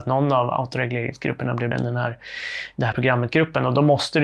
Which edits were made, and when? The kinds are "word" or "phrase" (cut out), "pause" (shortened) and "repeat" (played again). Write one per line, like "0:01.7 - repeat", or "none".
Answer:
0:01.7 - word
0:02.9 - word

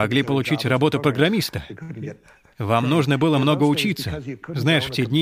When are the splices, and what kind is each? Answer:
none

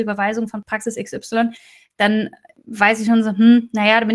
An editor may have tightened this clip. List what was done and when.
none

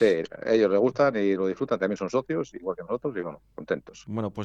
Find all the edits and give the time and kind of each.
none

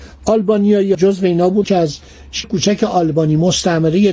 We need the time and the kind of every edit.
0:00.9 - word
0:01.6 - word
0:02.4 - word

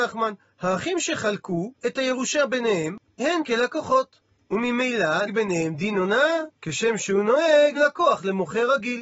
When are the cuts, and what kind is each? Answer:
0:01.8 - pause
0:03.2 - word
0:05.3 - word
0:06.6 - pause
0:07.8 - word

